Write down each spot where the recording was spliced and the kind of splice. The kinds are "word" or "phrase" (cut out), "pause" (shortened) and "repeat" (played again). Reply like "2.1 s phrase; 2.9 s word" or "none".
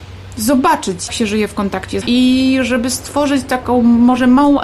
1.1 s word; 2.0 s word